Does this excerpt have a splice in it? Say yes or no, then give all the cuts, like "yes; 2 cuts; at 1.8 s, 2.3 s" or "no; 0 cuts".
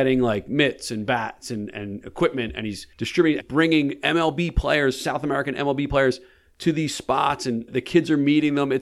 yes; 3 cuts; at 2.9 s, 3.4 s, 7.7 s